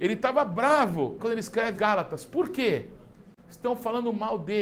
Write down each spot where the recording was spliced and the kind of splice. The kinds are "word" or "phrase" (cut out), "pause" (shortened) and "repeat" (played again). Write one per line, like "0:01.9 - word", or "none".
0:01.2 - word
0:01.7 - word